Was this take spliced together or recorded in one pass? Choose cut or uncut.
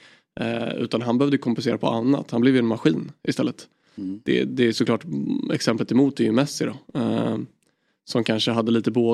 uncut